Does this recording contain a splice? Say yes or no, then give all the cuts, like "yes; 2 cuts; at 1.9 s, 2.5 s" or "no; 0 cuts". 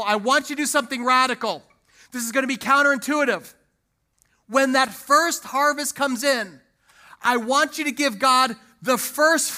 no; 0 cuts